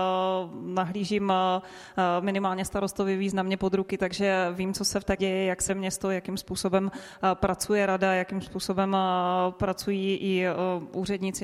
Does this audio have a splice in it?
yes; 2 cuts; at 5.2 s, 5.7 s

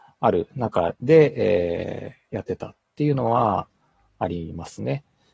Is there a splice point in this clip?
no; 0 cuts

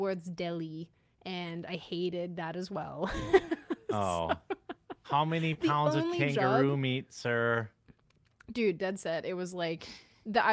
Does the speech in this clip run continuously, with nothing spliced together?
yes; 0 cuts

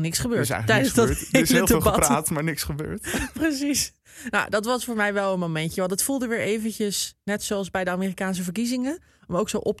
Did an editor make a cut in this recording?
no; 0 cuts

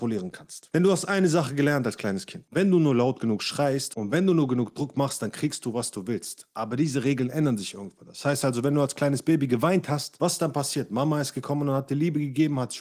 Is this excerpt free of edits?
yes; 0 cuts

